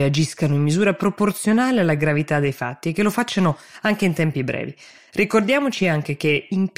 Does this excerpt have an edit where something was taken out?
no; 0 cuts

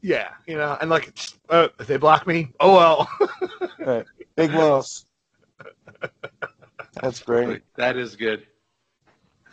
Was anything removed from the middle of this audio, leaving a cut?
yes; 3 cuts; at 1.4 s, 2.5 s, 7.7 s

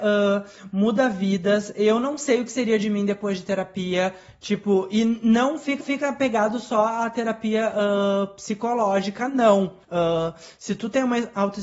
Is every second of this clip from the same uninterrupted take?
no; 2 cuts; at 5.8 s, 9.8 s

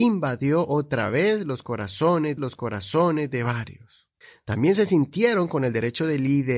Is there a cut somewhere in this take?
yes; 2 cuts; at 2.4 s, 4.2 s

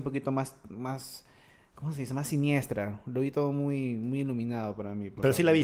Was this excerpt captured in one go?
yes; 0 cuts

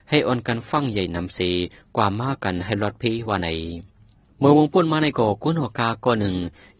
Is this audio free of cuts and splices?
yes; 0 cuts

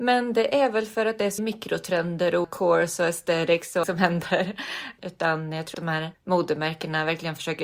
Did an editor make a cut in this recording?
yes; 5 cuts; at 1.4 s, 2.4 s, 3.8 s, 5.7 s, 6.1 s

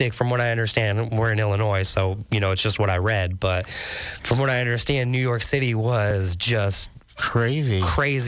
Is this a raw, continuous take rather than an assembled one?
yes; 0 cuts

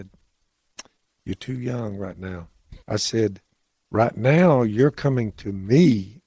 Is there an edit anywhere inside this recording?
yes; 2 cuts; at 2.8 s, 3.7 s

